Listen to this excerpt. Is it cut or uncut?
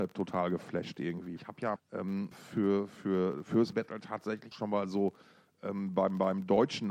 cut